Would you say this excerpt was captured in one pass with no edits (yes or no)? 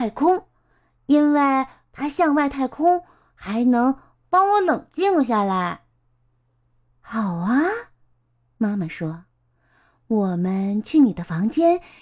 yes